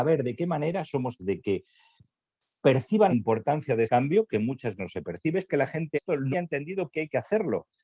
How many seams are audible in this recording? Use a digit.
8